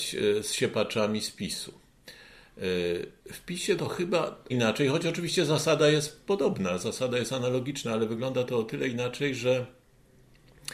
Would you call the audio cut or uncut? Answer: cut